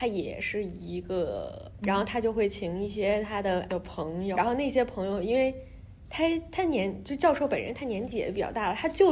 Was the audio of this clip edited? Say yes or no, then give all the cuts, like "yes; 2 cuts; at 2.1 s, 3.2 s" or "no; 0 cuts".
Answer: yes; 3 cuts; at 1.8 s, 3.7 s, 4.3 s